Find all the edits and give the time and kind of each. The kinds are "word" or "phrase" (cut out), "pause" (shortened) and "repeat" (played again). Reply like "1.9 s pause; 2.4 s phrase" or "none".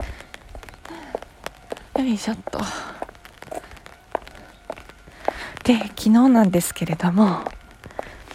1.9 s pause